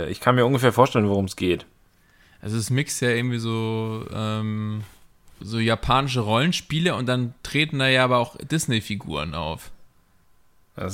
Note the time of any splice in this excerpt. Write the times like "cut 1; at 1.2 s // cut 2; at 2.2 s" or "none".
none